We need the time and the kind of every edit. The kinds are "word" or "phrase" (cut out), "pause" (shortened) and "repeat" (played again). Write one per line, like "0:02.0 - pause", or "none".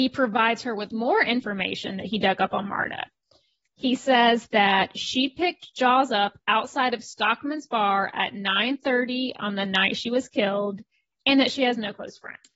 none